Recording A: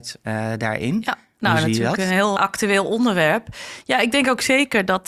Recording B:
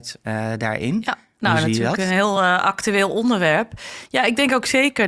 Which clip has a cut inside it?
A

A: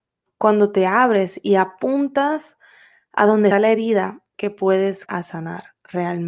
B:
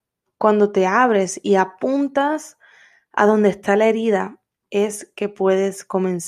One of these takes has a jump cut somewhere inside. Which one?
A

